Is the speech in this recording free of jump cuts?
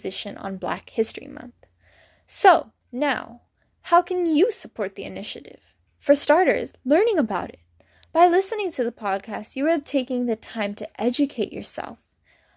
no; 1 cut; at 2.8 s

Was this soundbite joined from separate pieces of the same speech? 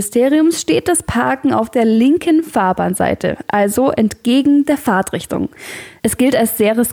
no; 0 cuts

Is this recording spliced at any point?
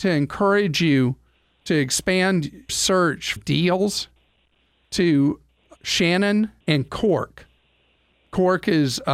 yes; 4 cuts; at 2.7 s, 3.4 s, 5.8 s, 6.6 s

